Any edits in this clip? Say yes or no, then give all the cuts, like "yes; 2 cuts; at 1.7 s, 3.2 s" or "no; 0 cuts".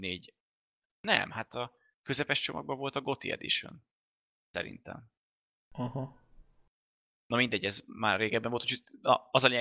no; 0 cuts